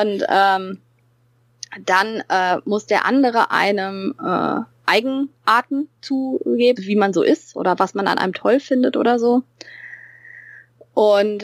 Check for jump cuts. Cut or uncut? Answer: cut